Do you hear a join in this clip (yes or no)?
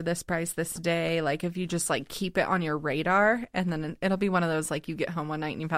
no